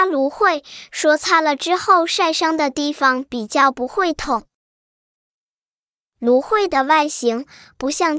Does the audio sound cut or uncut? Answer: uncut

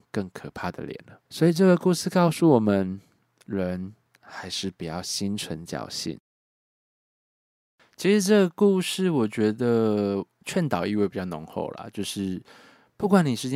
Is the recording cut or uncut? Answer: cut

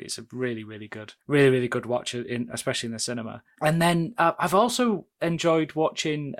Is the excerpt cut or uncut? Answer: cut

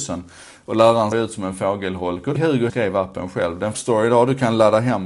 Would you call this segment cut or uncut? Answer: cut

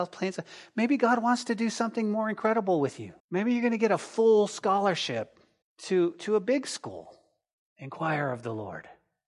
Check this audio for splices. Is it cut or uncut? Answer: cut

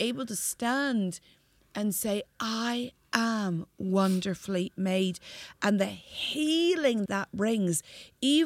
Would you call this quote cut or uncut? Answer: cut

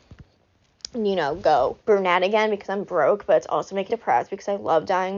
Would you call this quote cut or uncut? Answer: cut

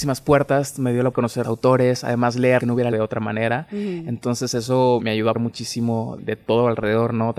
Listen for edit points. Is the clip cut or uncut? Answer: cut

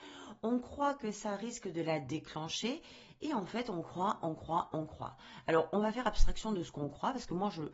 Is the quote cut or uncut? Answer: uncut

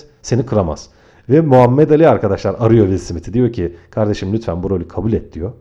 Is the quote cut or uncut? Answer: uncut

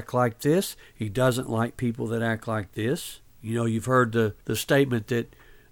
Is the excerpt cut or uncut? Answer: cut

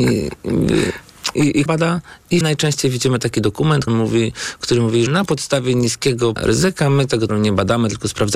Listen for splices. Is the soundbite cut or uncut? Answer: cut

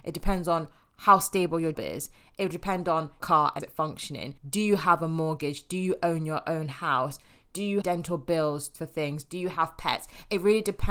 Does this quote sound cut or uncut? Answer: cut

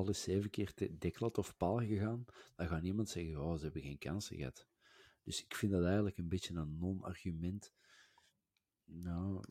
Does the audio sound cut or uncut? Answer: uncut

